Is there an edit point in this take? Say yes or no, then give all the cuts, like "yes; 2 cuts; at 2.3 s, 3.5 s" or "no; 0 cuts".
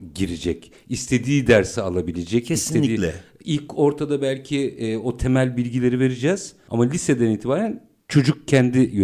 no; 0 cuts